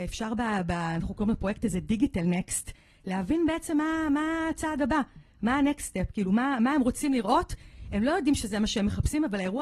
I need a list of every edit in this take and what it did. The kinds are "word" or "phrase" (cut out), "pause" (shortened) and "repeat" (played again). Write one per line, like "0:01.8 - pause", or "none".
none